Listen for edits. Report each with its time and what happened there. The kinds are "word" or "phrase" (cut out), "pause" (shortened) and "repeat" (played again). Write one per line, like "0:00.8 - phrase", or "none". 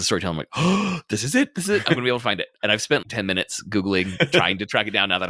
0:03.0 - word